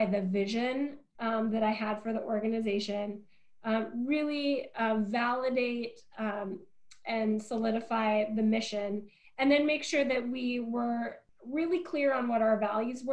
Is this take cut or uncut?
uncut